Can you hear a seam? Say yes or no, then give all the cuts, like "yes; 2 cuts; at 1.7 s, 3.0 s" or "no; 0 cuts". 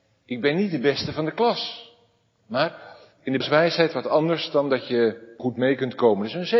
yes; 2 cuts; at 3.4 s, 5.4 s